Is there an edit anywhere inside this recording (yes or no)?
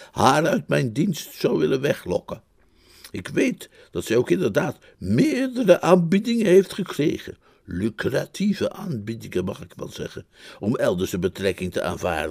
no